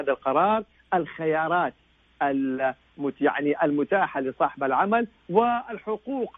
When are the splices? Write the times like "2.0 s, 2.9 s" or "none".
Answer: none